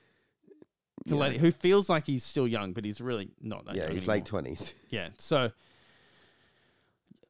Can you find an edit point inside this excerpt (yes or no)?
no